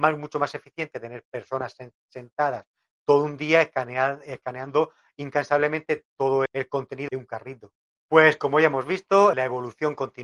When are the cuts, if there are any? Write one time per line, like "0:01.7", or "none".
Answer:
0:00.9
0:06.5
0:07.1
0:09.3